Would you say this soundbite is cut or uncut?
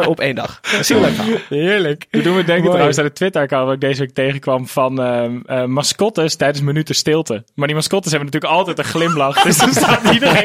uncut